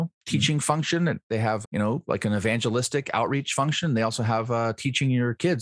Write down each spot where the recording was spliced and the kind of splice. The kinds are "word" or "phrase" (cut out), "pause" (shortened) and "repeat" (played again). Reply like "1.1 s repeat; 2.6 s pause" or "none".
1.6 s word